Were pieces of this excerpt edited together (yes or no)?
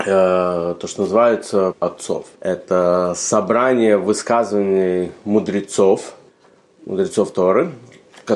yes